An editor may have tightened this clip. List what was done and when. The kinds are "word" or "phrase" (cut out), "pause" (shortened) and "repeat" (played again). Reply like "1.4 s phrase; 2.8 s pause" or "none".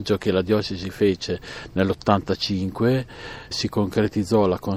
3.5 s word